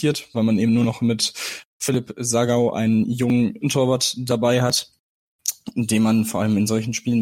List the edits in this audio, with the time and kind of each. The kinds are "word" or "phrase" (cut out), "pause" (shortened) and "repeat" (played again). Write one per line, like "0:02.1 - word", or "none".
0:03.6 - word